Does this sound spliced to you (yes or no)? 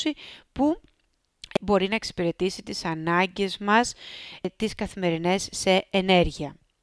no